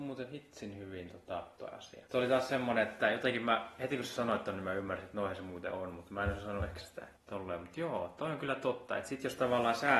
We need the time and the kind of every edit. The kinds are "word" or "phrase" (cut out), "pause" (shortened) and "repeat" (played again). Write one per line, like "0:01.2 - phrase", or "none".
0:01.6 - word
0:02.1 - pause
0:06.8 - word
0:07.2 - pause

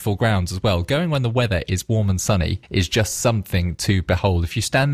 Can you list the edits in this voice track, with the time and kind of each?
0:02.6 - pause

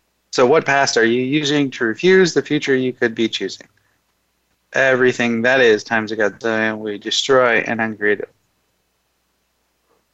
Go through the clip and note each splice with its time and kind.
none

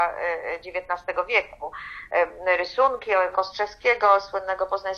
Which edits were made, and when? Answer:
0:03.3 - word

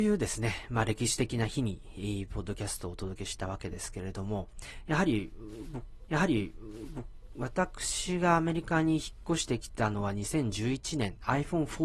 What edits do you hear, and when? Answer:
0:06.1 - repeat

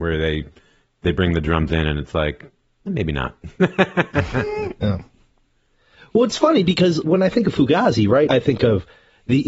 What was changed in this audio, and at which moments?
0:02.9 - word
0:07.0 - word
0:08.3 - word

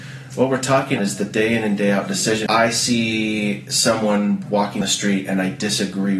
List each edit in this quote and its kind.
0:01.0 - word
0:02.5 - word
0:04.8 - word

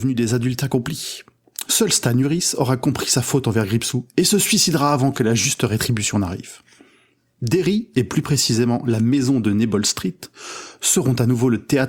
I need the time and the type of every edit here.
none

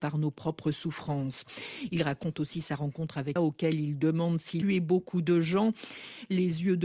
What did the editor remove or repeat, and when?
0:03.4 - phrase
0:04.6 - word

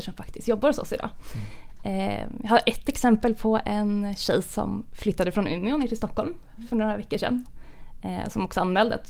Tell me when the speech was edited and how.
none

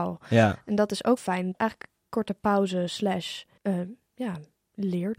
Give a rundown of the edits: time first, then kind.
0:01.2 - word
0:01.5 - phrase
0:03.6 - pause

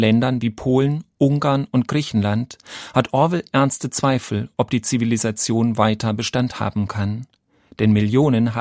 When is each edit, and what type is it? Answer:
none

